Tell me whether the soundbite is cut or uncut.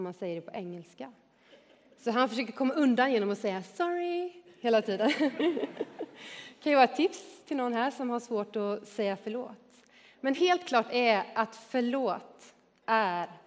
uncut